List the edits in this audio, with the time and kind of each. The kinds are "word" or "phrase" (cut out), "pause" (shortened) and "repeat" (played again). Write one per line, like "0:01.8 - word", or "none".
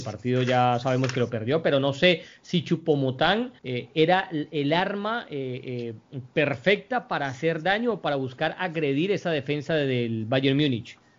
0:03.6 - pause